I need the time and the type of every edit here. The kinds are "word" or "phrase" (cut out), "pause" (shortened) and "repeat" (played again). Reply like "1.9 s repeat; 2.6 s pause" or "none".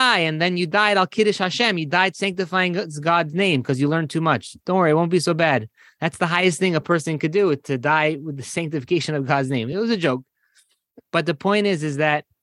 none